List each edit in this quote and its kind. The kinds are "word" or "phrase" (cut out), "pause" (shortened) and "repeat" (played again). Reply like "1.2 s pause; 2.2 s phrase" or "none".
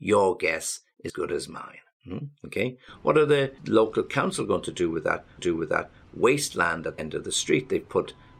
1.1 s word; 3.6 s pause; 5.4 s repeat; 7.0 s word